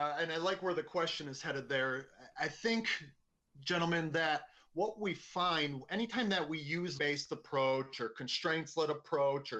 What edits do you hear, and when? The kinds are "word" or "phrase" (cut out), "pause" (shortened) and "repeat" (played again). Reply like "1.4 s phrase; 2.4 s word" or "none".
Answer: 7.0 s phrase